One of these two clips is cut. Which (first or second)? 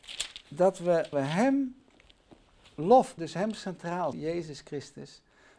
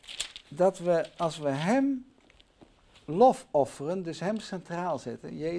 first